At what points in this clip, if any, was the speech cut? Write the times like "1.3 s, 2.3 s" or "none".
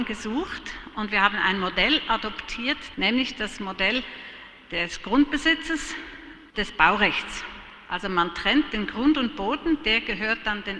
6.5 s